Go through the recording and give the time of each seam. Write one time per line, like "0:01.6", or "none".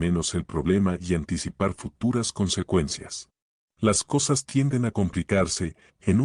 0:03.6